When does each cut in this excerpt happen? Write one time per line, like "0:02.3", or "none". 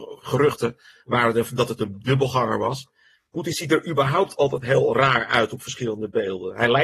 none